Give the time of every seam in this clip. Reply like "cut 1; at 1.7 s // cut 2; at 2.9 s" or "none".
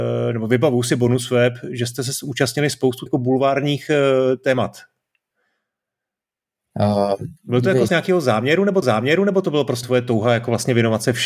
cut 1; at 3.1 s // cut 2; at 7.9 s // cut 3; at 8.8 s // cut 4; at 9.8 s